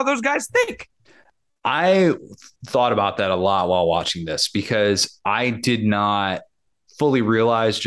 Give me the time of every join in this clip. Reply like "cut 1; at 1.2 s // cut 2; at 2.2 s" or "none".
none